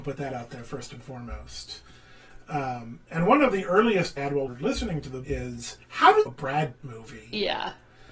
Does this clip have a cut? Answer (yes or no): yes